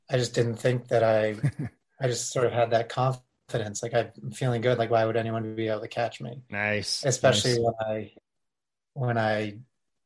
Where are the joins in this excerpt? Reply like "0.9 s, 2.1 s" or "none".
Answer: none

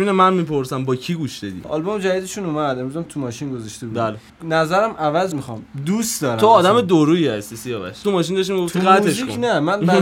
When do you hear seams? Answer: 1.6 s, 3.1 s, 5.3 s, 8.0 s

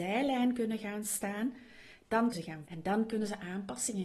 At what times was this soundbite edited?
2.3 s, 2.6 s

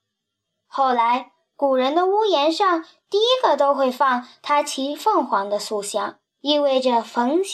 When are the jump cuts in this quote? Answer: 6.3 s

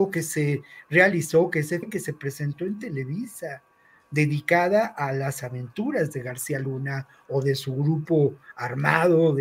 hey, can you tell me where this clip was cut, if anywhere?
1.8 s

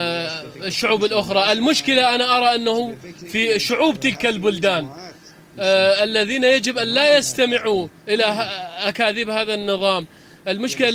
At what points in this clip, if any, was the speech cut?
8.0 s

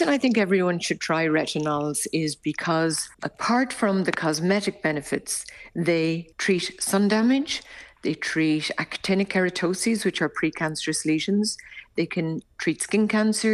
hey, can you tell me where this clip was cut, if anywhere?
3.1 s, 6.3 s

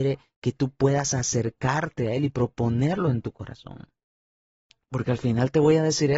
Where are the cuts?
none

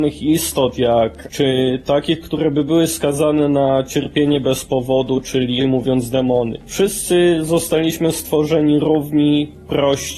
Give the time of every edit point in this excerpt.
1.3 s, 5.6 s

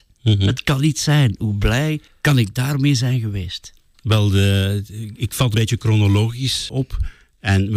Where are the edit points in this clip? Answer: 2.1 s, 5.5 s, 6.7 s

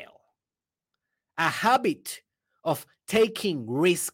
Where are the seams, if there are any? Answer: none

